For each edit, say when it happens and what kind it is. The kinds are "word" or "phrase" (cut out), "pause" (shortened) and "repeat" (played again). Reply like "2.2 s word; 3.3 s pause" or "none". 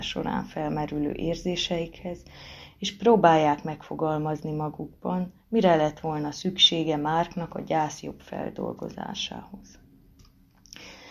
5.4 s pause

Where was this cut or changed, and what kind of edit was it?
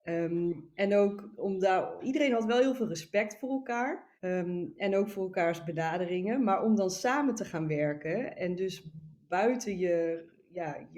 1.4 s word; 2.0 s word; 4.2 s pause

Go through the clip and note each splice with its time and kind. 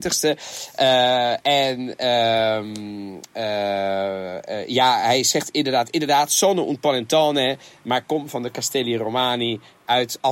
none

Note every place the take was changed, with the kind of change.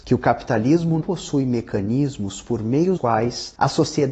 1.0 s word; 3.0 s word

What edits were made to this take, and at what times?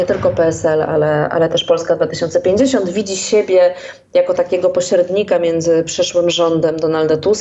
none

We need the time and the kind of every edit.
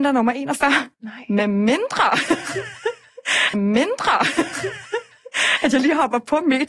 0.9 s pause; 3.5 s repeat

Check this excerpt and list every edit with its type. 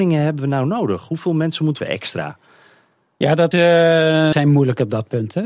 1.8 s phrase; 3.5 s word; 4.3 s word

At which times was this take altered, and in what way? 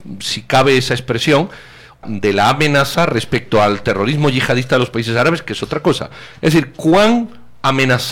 2.0 s phrase

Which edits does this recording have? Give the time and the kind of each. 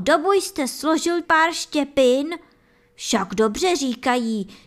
1.2 s word

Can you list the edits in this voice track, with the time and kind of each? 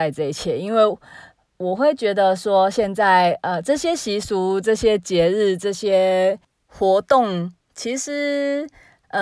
none

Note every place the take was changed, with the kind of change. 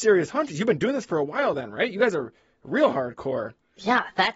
none

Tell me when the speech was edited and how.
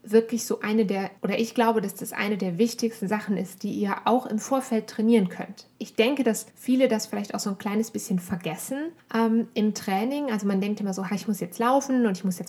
1.2 s pause; 5.7 s pause; 6.5 s pause; 9.0 s pause

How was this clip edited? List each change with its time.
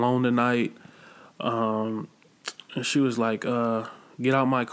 none

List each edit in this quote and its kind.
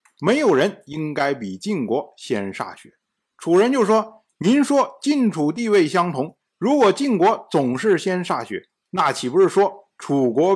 3.0 s pause

